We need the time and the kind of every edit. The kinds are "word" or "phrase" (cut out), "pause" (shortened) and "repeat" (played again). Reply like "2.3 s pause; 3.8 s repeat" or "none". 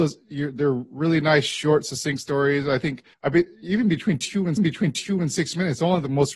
3.1 s pause; 4.6 s repeat